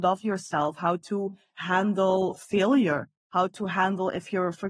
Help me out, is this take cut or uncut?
uncut